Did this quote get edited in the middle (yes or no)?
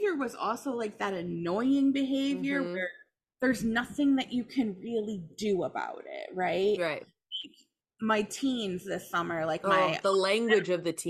no